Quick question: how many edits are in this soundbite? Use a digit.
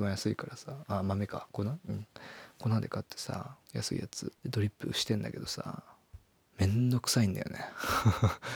3